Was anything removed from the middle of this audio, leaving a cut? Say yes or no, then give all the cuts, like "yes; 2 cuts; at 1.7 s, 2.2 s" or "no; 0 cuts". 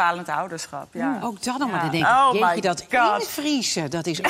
no; 0 cuts